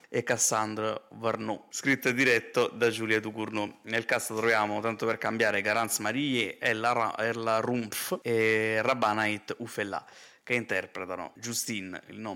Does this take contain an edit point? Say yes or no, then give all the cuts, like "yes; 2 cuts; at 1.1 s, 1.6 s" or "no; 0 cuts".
no; 0 cuts